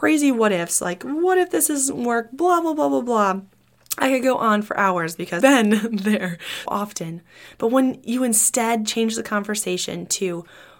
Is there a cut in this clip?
yes; 2 cuts; at 5.4 s, 6.7 s

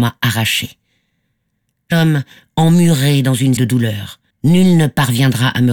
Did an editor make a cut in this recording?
yes; 3 cuts; at 1.9 s, 3.6 s, 4.3 s

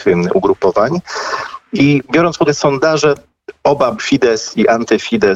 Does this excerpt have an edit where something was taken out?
yes; 2 cuts; at 2.4 s, 3.9 s

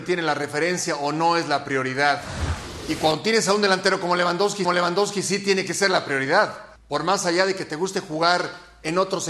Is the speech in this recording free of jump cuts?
no; 2 cuts; at 4.6 s, 6.8 s

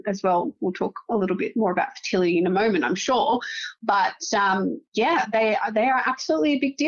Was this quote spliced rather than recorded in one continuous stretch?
no; 0 cuts

